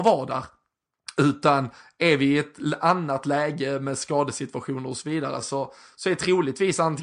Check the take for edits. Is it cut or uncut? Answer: uncut